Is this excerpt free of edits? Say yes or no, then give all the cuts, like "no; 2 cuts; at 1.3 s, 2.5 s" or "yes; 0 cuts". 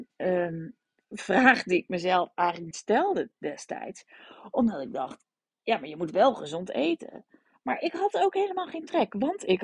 no; 1 cut; at 2.7 s